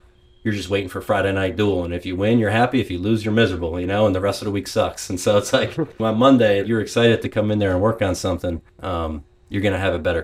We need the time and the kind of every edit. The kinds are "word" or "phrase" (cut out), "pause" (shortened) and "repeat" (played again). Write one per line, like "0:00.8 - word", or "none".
0:06.0 - phrase
0:06.6 - word
0:08.7 - pause